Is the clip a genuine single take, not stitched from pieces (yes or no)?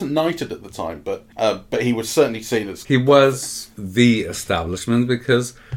no